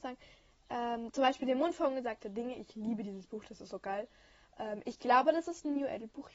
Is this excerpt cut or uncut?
uncut